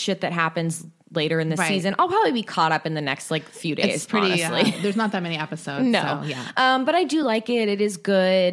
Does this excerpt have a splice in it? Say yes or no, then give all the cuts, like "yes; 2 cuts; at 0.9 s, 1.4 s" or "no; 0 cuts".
no; 0 cuts